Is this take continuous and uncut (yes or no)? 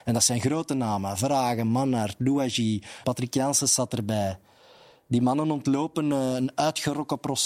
no